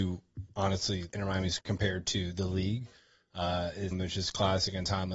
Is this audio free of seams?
no; 3 cuts; at 1.1 s, 1.6 s, 3.9 s

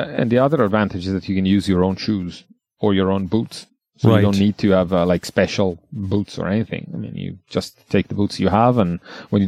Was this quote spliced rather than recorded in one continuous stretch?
no; 0 cuts

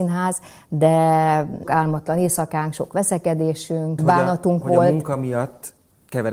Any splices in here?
yes; 2 cuts; at 1.6 s, 4.0 s

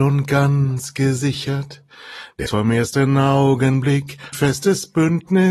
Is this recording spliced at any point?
yes; 2 cuts; at 2.5 s, 4.3 s

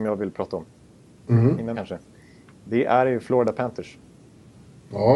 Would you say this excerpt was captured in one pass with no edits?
no; 1 cut; at 1.7 s

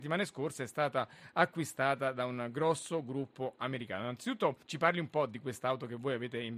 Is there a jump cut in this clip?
yes; 1 cut; at 4.6 s

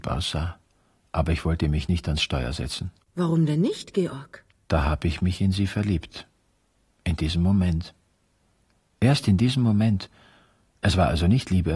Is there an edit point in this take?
no; 0 cuts

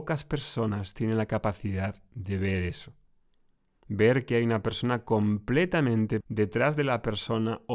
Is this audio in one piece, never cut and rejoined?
no; 1 cut; at 6.2 s

